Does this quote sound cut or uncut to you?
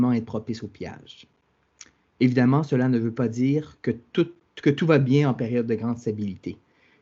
uncut